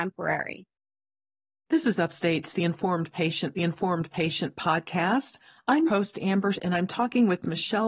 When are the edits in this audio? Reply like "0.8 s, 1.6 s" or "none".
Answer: 3.6 s, 5.9 s, 6.5 s